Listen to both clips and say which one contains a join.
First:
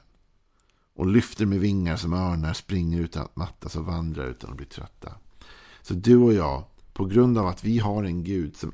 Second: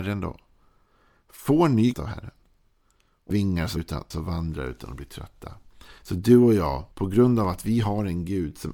second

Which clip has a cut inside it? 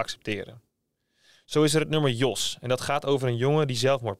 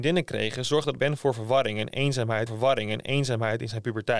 second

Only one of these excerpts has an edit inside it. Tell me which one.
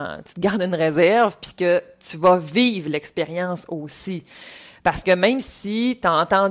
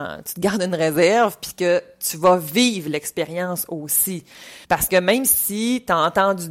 second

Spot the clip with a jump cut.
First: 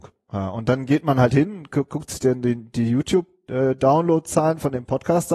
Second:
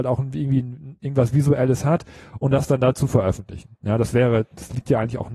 second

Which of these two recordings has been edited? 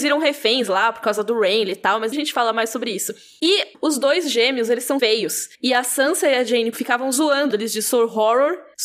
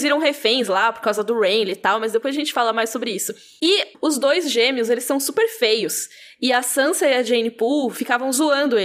first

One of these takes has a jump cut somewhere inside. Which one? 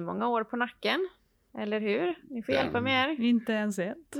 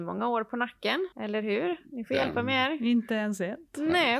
second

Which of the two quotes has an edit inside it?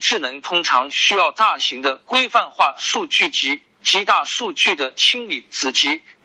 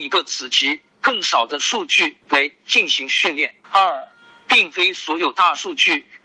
second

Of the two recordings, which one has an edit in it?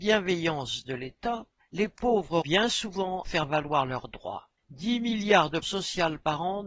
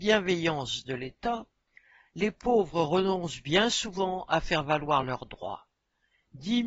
first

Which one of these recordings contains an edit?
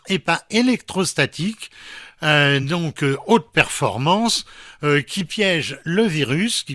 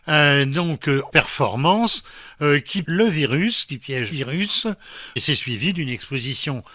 second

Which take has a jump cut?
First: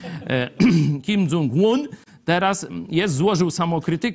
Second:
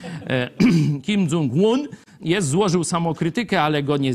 second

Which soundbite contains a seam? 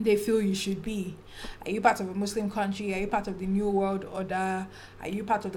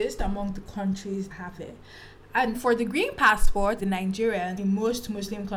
second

